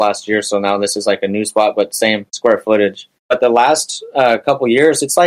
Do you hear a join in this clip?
yes; 2 cuts; at 2.3 s, 3.2 s

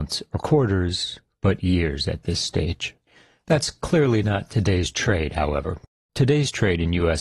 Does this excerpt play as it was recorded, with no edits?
yes; 0 cuts

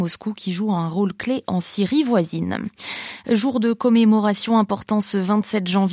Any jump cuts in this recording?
no; 0 cuts

